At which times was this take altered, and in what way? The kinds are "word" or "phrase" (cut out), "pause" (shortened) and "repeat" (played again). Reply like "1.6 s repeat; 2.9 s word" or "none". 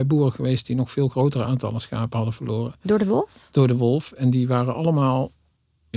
none